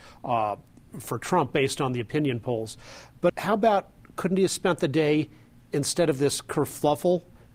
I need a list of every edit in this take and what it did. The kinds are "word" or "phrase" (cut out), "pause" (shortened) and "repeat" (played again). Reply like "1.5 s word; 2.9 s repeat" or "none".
3.3 s word